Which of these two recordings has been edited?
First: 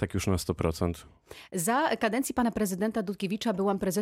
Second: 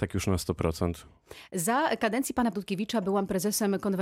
second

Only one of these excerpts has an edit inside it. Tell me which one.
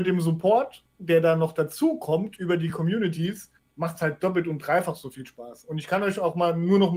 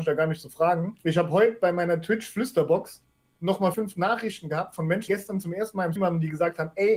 second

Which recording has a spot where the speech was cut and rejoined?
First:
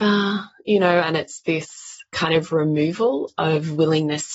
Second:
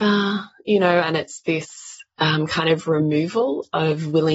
first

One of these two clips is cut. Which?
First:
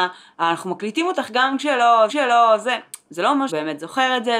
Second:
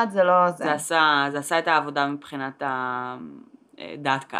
first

